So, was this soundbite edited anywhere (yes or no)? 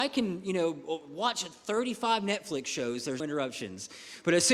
yes